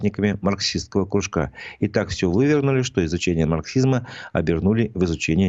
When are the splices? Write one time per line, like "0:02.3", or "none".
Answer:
none